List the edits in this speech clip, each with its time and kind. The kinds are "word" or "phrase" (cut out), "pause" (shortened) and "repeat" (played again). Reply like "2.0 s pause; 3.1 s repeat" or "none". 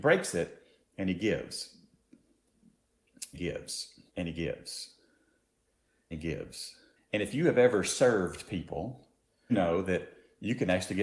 3.3 s word; 4.1 s pause; 6.1 s word; 7.0 s pause; 9.5 s word

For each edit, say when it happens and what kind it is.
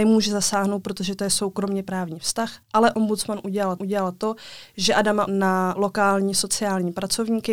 2.6 s pause; 3.8 s repeat; 5.3 s word; 5.8 s word

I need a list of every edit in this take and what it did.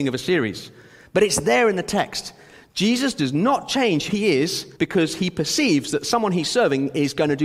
4.1 s word; 4.8 s pause

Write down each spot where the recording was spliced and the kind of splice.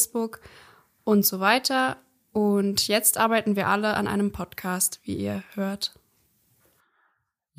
none

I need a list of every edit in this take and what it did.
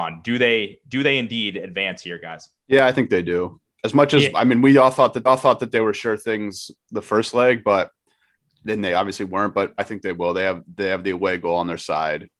2.6 s pause; 3.6 s pause; 5.3 s repeat; 8.3 s pause; 9.8 s word

